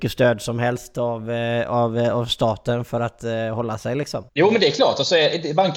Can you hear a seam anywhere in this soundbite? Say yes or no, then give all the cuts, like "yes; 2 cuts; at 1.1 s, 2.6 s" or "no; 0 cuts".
yes; 1 cut; at 4.3 s